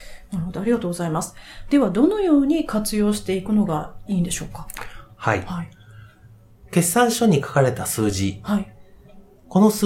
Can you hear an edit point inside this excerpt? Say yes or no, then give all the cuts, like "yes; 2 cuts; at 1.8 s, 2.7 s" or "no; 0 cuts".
no; 0 cuts